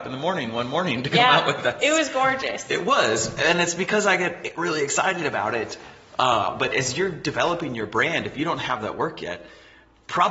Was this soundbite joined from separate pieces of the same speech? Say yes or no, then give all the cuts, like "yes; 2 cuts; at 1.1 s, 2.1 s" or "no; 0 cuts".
no; 0 cuts